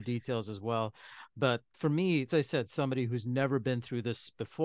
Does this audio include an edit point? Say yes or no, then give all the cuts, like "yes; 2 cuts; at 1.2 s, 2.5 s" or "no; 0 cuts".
yes; 2 cuts; at 1.7 s, 2.3 s